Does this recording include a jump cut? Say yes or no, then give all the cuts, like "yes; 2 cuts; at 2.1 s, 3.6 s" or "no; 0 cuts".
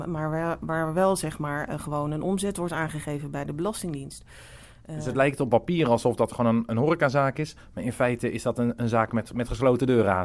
no; 0 cuts